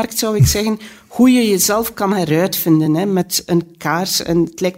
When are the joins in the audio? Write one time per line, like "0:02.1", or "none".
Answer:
none